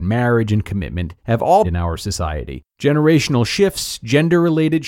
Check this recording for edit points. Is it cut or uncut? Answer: cut